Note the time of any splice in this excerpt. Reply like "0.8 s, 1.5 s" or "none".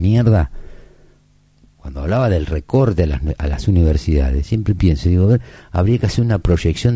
none

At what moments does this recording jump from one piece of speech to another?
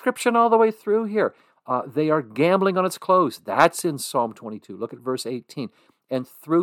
none

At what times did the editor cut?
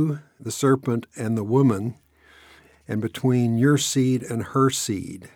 none

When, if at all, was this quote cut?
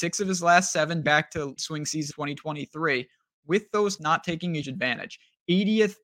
1.0 s, 1.6 s, 2.1 s, 4.0 s, 4.6 s

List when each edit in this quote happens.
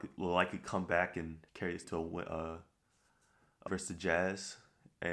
1.5 s, 1.8 s, 3.7 s

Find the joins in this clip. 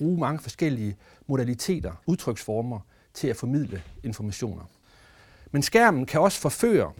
2.0 s

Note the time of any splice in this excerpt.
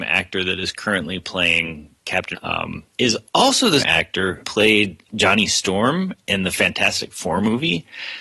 2.3 s, 2.9 s, 3.8 s, 4.4 s, 5.1 s

